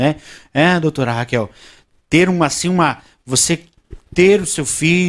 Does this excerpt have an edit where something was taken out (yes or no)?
no